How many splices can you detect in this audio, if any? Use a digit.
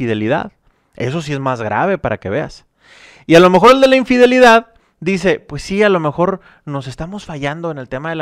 0